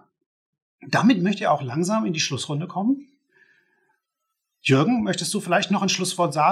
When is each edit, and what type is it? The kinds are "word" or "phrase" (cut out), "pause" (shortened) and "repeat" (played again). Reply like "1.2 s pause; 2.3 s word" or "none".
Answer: none